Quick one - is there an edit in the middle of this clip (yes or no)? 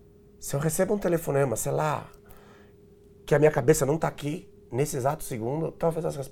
no